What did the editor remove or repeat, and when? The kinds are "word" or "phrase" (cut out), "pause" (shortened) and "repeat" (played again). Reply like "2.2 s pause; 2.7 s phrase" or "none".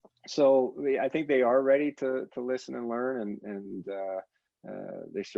none

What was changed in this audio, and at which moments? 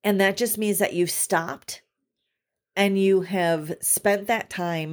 none

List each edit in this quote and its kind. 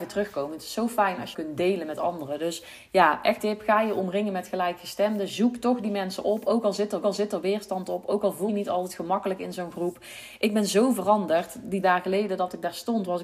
1.3 s word; 3.4 s word; 7.0 s repeat; 8.5 s word; 11.8 s phrase

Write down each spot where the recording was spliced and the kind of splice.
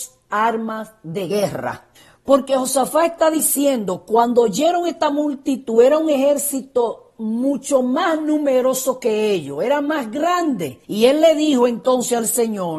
2.0 s pause; 10.8 s pause

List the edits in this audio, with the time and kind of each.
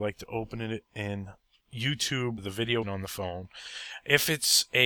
2.4 s word; 2.8 s word

